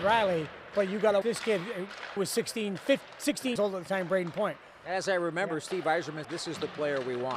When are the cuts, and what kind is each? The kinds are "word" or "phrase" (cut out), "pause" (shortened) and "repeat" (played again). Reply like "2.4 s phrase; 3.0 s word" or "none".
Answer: 1.2 s word; 2.2 s word; 3.6 s word; 6.2 s word